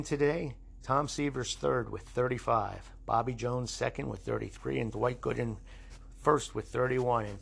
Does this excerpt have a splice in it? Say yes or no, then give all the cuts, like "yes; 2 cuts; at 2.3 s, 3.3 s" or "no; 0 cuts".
no; 0 cuts